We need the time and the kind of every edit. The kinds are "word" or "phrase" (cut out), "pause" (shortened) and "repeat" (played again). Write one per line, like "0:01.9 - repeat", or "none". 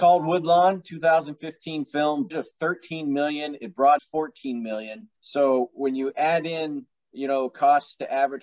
0:02.3 - word
0:04.0 - word
0:05.2 - pause
0:06.9 - pause